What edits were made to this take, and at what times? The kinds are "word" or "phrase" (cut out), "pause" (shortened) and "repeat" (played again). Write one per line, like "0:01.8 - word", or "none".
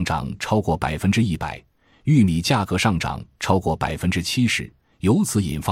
none